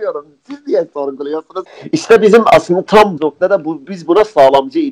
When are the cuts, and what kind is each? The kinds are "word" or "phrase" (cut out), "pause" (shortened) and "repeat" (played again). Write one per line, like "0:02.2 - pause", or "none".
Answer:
0:03.2 - word
0:03.9 - word